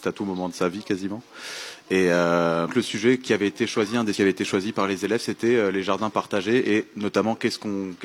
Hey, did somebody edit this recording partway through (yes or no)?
yes